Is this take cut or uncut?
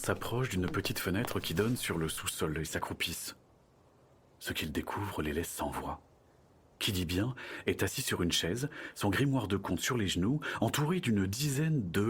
uncut